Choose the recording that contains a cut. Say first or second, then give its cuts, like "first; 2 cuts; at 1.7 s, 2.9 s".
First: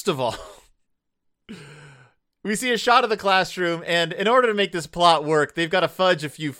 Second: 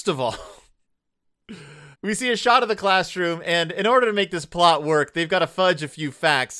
second; 1 cut; at 1.9 s